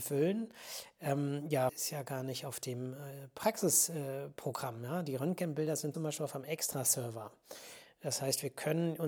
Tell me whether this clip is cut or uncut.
cut